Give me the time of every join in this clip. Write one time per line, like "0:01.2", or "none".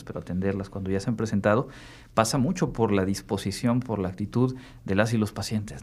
none